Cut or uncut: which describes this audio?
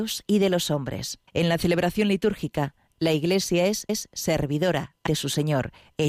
cut